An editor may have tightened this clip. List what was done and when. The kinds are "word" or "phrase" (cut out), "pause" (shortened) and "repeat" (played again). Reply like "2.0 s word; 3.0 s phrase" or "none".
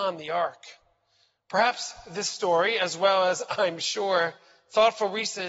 none